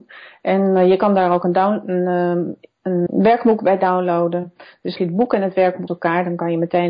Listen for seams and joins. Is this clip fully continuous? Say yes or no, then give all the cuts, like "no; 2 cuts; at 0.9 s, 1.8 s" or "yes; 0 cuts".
no; 3 cuts; at 3.1 s, 5.0 s, 5.9 s